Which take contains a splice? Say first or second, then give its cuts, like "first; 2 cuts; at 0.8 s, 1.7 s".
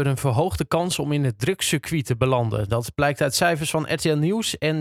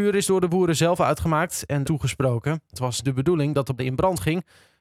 second; 3 cuts; at 1.8 s, 3.0 s, 3.8 s